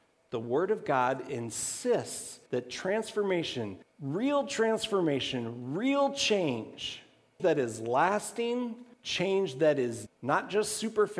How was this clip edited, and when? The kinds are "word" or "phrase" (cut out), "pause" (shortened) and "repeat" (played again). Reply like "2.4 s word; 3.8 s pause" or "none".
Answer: 2.5 s pause; 3.8 s pause; 7.4 s word; 8.9 s pause; 10.1 s word